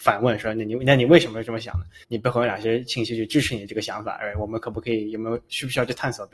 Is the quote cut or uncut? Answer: cut